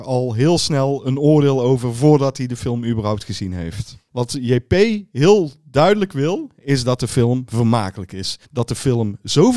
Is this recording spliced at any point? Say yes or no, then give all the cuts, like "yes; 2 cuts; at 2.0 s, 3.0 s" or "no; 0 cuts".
yes; 1 cut; at 8.4 s